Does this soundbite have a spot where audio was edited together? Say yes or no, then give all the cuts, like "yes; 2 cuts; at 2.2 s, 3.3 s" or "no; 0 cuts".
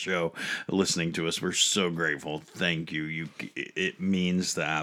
no; 0 cuts